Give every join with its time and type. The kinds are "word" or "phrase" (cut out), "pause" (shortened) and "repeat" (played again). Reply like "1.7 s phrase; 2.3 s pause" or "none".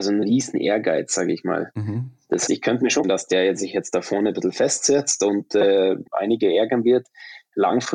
2.5 s word; 3.0 s word; 6.1 s pause

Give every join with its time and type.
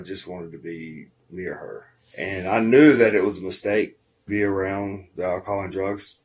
4.3 s word

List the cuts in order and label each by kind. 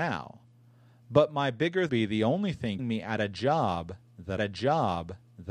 1.9 s phrase; 2.8 s word; 4.4 s repeat

